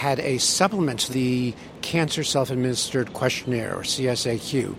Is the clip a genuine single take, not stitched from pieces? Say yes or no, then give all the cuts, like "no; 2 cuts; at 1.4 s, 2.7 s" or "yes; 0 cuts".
no; 1 cut; at 1.1 s